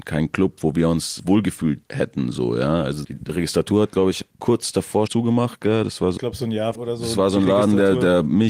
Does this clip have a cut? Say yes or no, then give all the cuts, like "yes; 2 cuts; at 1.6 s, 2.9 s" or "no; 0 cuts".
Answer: yes; 7 cuts; at 1.2 s, 1.9 s, 3.0 s, 4.3 s, 5.1 s, 6.2 s, 6.7 s